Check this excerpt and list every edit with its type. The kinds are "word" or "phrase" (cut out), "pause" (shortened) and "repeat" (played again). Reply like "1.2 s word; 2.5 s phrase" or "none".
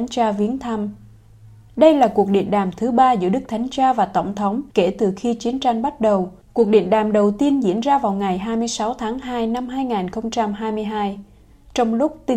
4.7 s pause; 6.4 s pause